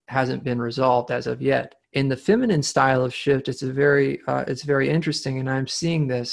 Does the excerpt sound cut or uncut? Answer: cut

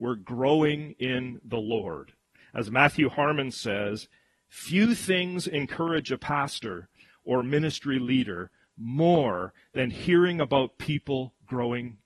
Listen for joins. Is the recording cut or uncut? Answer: uncut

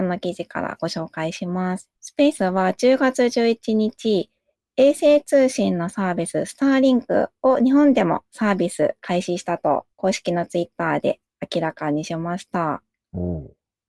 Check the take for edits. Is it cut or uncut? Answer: cut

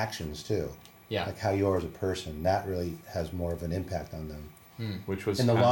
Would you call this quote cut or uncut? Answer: uncut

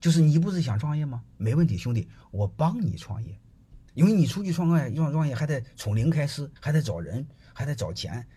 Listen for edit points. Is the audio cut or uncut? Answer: cut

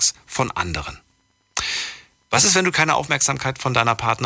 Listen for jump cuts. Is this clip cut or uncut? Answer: uncut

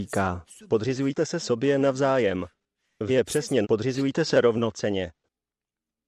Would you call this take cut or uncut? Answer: cut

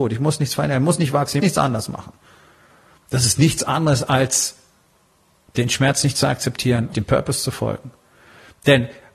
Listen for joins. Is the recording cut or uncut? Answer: cut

